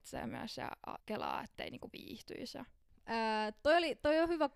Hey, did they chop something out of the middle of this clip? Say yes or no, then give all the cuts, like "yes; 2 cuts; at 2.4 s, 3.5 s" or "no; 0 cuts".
yes; 1 cut; at 1.0 s